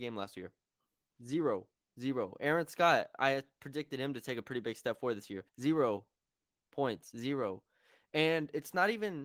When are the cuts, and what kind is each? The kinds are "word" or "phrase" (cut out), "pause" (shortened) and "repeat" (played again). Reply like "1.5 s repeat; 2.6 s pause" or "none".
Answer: 1.7 s pause; 5.5 s pause